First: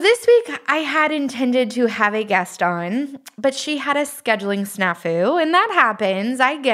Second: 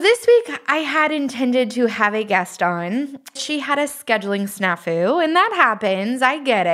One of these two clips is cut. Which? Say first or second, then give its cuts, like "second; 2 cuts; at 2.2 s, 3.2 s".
second; 1 cut; at 3.4 s